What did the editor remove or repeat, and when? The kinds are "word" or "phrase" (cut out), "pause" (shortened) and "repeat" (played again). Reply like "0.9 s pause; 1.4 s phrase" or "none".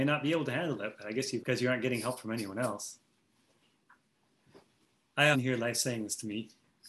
1.4 s word; 5.3 s word